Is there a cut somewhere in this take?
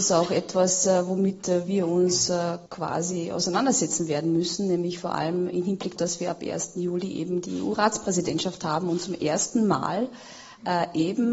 yes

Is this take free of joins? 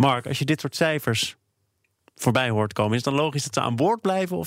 yes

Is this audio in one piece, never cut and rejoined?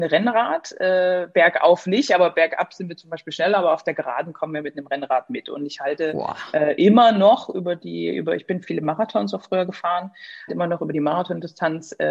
no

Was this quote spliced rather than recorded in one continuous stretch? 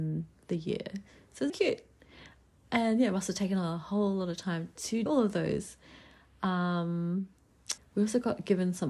yes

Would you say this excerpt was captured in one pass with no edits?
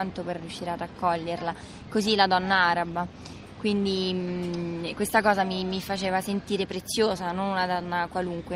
yes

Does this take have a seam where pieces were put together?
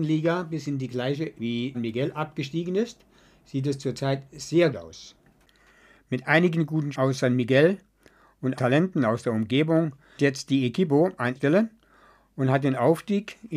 yes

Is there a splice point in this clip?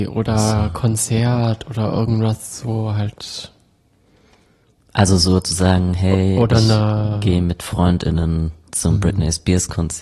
no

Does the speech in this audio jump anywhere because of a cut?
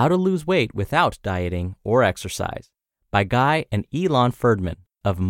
no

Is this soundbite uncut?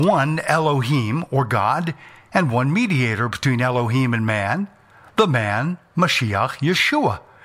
yes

